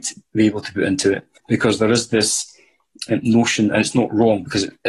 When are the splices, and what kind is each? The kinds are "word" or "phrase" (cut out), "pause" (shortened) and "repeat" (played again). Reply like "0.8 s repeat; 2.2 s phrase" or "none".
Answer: 1.4 s pause